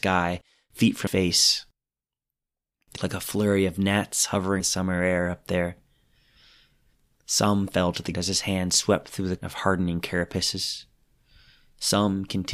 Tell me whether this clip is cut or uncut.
cut